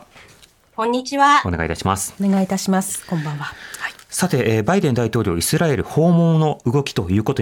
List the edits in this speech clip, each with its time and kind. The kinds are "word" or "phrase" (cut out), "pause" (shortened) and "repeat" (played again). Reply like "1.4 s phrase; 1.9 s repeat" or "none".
none